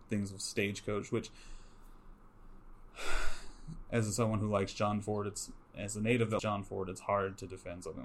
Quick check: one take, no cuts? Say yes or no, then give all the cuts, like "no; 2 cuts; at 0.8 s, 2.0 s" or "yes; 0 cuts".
no; 1 cut; at 6.4 s